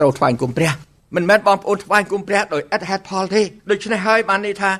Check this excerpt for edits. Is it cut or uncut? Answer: cut